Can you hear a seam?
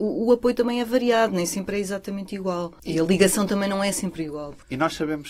no; 0 cuts

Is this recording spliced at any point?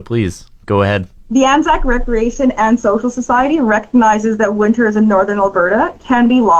yes; 1 cut; at 1.2 s

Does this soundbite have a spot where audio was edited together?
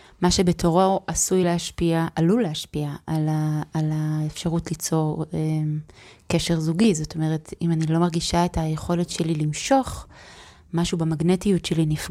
no; 0 cuts

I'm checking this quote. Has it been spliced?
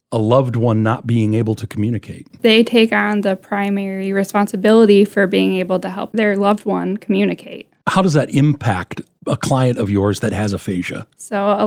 no; 0 cuts

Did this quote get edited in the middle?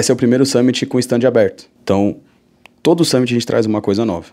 yes; 1 cut; at 1.7 s

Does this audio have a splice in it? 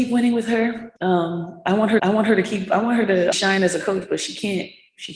yes; 3 cuts; at 1.0 s, 2.0 s, 3.3 s

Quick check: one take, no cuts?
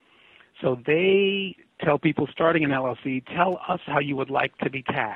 yes; 0 cuts

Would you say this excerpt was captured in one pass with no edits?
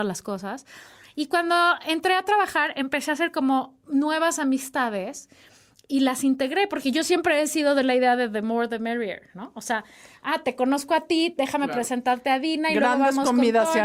yes; 0 cuts

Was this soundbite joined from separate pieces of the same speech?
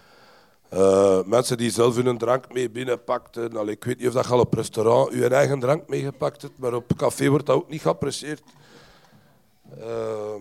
no; 0 cuts

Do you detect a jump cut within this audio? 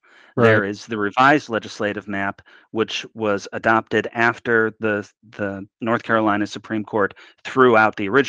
no; 0 cuts

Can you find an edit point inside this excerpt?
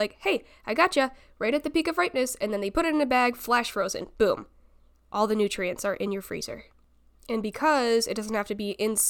no; 0 cuts

